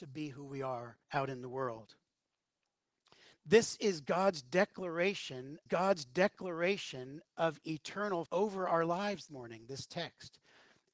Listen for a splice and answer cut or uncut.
cut